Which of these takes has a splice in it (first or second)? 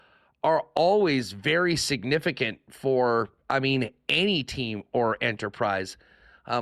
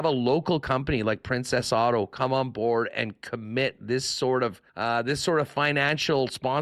second